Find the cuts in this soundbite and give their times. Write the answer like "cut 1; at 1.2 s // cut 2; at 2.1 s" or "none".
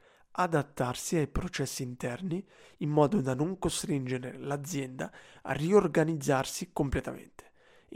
none

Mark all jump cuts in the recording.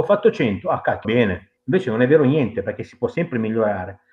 cut 1; at 1.0 s // cut 2; at 1.6 s

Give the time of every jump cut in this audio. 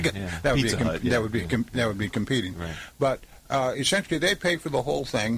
none

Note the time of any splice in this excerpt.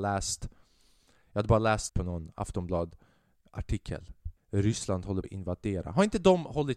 cut 1; at 1.9 s // cut 2; at 4.4 s // cut 3; at 5.2 s

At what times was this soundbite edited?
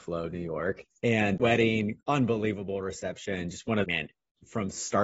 cut 1; at 1.4 s // cut 2; at 2.0 s // cut 3; at 3.8 s

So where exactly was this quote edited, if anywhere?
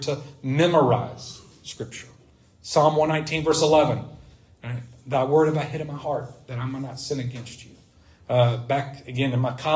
none

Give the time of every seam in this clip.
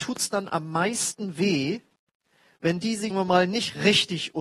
cut 1; at 3.1 s

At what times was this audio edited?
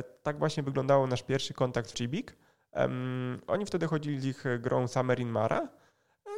cut 1; at 1.9 s

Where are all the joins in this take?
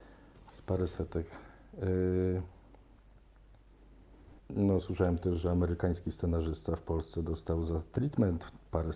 cut 1; at 4.4 s

